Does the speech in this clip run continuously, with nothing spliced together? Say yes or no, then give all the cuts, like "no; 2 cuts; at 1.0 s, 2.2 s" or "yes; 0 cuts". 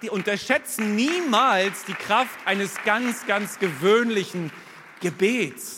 yes; 0 cuts